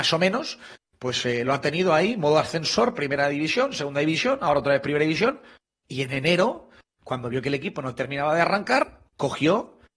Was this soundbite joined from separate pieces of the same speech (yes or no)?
no